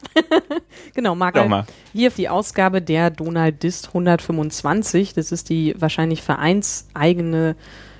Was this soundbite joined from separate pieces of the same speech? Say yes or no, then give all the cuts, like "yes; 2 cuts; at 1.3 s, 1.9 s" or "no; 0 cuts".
yes; 2 cuts; at 1.3 s, 2.1 s